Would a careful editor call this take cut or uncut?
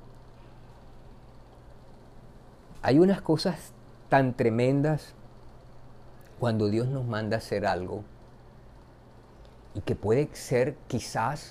uncut